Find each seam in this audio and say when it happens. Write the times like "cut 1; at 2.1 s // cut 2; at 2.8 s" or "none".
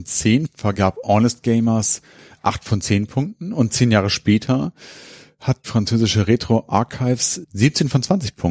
cut 1; at 5.6 s

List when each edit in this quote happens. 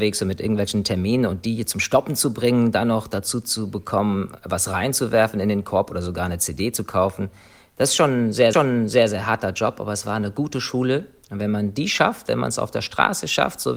cut 1; at 8.5 s

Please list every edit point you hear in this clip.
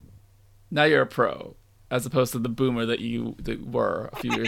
none

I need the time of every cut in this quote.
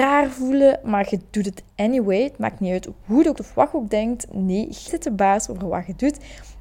cut 1; at 3.4 s // cut 2; at 4.9 s

